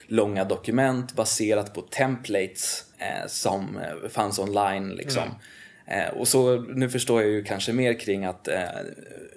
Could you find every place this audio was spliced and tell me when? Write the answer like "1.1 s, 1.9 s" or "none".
2.9 s